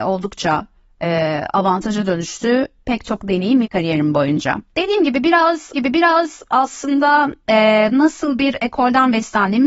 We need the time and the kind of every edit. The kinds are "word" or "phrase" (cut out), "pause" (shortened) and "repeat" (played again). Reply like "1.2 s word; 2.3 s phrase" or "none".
3.6 s word; 4.7 s pause; 5.7 s repeat